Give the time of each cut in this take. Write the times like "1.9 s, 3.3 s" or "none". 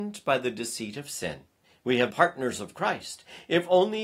1.6 s, 2.1 s